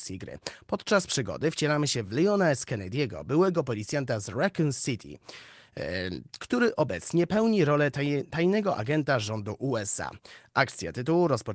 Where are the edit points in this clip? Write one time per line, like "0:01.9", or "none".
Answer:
none